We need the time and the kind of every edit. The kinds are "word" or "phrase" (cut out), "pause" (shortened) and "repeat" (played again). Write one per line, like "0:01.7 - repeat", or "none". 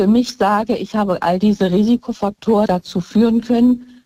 0:02.7 - word